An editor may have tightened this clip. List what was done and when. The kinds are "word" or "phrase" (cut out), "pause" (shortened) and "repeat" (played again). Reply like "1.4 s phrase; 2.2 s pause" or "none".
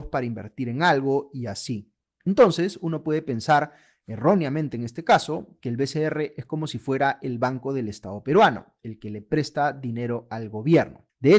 none